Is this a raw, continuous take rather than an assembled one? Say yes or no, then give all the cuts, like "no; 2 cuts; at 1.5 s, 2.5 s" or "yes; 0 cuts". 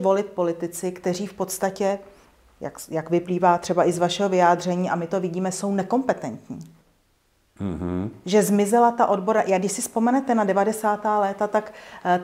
yes; 0 cuts